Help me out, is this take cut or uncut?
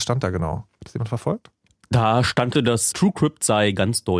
cut